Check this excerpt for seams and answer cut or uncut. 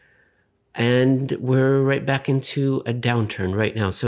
uncut